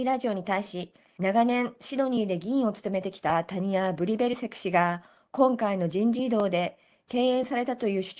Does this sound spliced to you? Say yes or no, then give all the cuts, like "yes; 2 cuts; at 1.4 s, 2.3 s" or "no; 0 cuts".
no; 0 cuts